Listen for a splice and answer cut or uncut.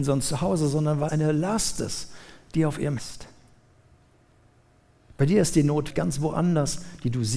cut